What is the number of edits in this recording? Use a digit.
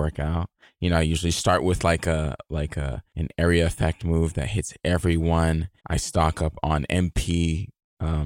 2